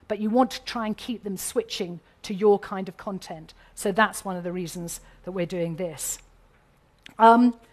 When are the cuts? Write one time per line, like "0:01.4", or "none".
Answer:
none

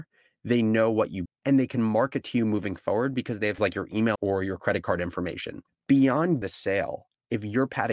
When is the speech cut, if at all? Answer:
0:01.3
0:03.6
0:04.2
0:06.4

